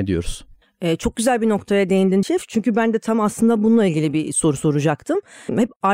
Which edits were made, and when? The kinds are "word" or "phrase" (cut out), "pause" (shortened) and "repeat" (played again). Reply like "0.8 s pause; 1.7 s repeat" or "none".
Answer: 2.2 s word